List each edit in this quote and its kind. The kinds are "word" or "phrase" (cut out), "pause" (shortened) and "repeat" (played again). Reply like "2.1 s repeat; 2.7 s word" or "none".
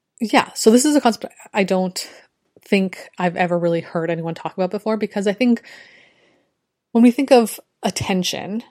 none